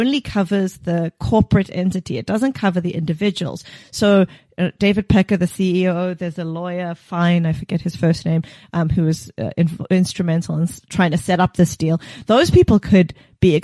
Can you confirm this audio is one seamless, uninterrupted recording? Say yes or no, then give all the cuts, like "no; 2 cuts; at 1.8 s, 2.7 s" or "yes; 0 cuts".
yes; 0 cuts